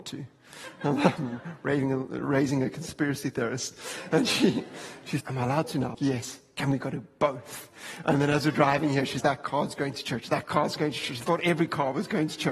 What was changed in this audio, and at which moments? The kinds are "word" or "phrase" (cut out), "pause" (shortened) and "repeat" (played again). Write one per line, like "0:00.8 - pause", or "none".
0:05.2 - word
0:05.9 - word
0:09.2 - word